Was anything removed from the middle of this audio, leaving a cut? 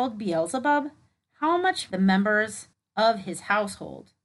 yes; 1 cut; at 1.9 s

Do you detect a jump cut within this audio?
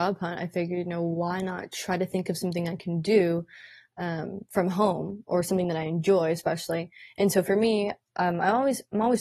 no; 0 cuts

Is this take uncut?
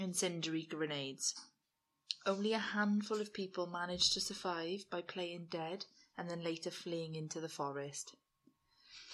yes; 0 cuts

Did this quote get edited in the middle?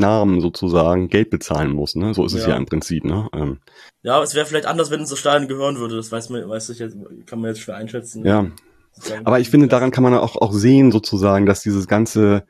no; 0 cuts

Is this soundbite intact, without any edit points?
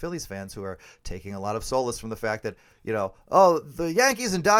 yes; 0 cuts

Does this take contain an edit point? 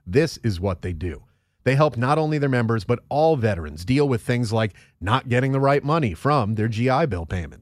no; 0 cuts

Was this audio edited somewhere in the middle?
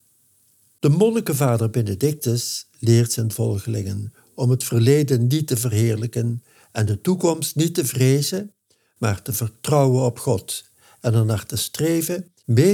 no; 0 cuts

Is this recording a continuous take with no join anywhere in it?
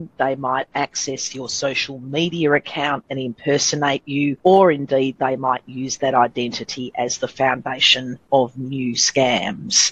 yes; 0 cuts

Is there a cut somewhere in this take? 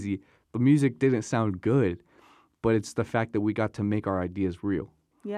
no; 0 cuts

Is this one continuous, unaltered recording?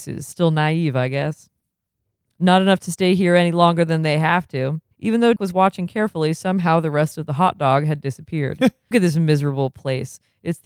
no; 3 cuts; at 4.9 s, 5.4 s, 8.9 s

